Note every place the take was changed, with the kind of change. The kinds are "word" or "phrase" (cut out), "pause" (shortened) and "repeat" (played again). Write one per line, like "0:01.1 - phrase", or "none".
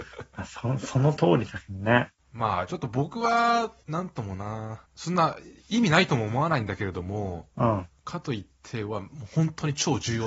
0:04.9 - pause
0:07.5 - pause